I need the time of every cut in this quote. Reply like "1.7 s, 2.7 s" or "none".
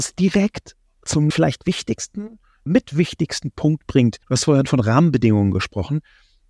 1.3 s, 2.7 s, 4.2 s